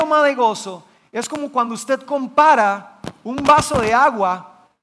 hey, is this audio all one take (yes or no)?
yes